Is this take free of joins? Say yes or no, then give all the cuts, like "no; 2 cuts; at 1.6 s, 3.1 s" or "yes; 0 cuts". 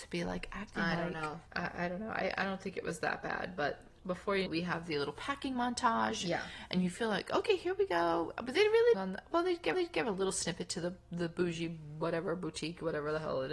no; 4 cuts; at 1.5 s, 4.5 s, 8.9 s, 9.7 s